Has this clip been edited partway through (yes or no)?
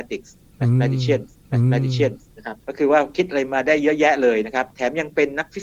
yes